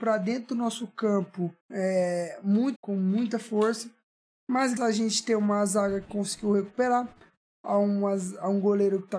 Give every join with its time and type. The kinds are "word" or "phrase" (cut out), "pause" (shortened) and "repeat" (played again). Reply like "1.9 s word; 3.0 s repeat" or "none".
1.6 s pause; 2.8 s phrase; 4.8 s word